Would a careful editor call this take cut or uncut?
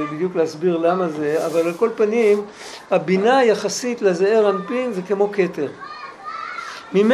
uncut